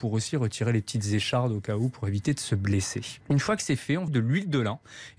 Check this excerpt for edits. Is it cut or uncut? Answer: cut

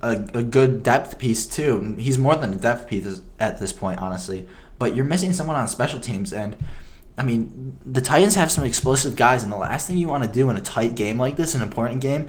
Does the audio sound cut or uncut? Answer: uncut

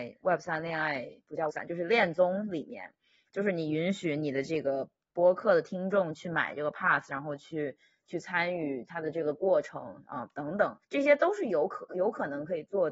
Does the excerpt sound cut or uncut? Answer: cut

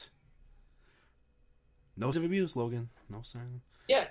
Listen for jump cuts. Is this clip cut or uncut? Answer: cut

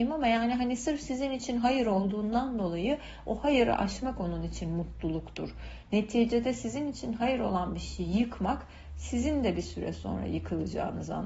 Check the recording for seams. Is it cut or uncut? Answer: uncut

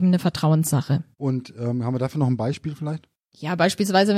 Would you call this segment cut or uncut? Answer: cut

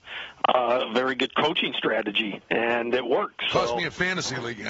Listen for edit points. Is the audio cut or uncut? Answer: uncut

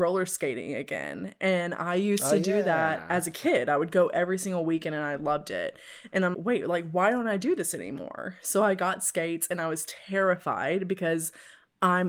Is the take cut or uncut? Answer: cut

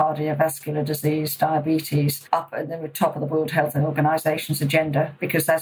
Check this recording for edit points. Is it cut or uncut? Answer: uncut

